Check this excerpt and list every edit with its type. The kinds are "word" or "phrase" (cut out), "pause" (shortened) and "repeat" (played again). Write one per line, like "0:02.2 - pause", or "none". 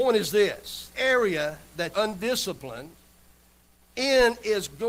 0:00.9 - word
0:01.9 - word

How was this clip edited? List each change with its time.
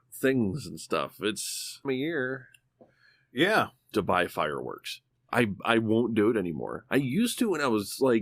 0:01.8 - phrase
0:03.9 - phrase

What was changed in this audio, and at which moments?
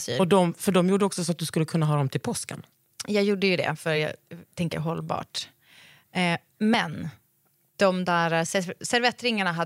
none

